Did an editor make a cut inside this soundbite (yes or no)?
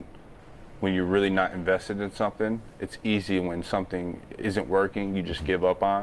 no